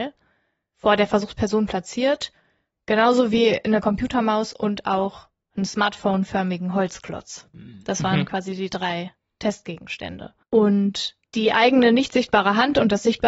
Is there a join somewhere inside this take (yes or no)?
yes